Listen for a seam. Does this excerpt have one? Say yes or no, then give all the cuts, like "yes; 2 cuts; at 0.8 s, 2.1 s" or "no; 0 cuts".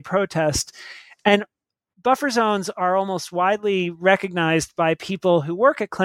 no; 0 cuts